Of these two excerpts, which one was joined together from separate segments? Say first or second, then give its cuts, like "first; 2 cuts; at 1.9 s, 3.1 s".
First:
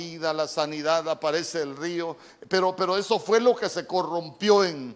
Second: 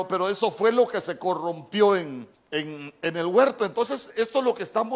second; 1 cut; at 2.3 s